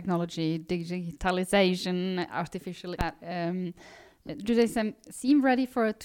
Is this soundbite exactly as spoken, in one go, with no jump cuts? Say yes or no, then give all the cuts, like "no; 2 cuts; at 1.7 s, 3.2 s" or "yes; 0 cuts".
no; 1 cut; at 2.9 s